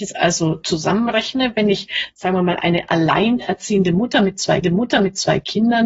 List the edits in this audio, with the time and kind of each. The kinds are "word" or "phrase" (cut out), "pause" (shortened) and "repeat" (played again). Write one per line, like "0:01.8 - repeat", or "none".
0:04.6 - repeat